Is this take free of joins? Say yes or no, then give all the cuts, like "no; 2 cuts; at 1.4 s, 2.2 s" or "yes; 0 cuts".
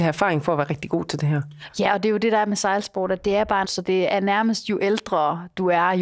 no; 1 cut; at 3.6 s